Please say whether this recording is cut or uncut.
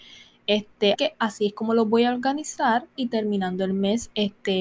cut